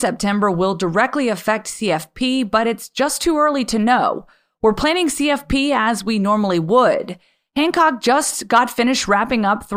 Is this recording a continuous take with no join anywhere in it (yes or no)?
yes